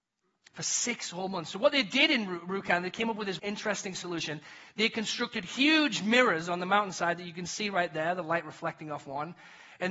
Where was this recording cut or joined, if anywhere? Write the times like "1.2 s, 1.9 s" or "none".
3.4 s